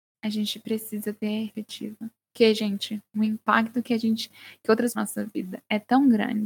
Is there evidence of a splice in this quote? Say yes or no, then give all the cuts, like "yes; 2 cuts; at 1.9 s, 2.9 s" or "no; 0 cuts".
yes; 3 cuts; at 1.5 s, 3.1 s, 4.9 s